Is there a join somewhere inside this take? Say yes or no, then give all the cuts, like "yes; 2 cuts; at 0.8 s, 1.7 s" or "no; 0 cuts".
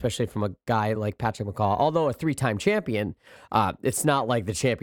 no; 0 cuts